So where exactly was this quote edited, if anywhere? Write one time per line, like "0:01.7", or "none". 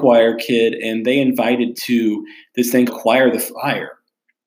0:01.8
0:02.9